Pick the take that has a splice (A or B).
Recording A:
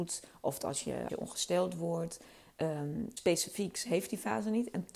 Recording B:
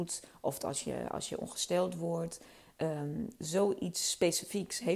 A